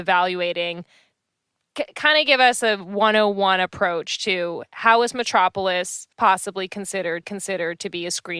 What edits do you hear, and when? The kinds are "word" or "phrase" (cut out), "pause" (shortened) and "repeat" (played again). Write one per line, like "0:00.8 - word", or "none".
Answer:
0:06.1 - pause
0:07.2 - repeat